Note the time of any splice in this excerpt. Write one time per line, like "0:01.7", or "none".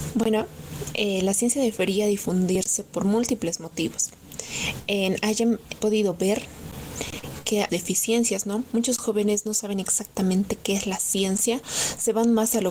0:05.8
0:07.7